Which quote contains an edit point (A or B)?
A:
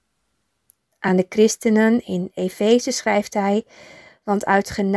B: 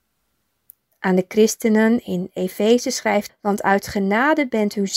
B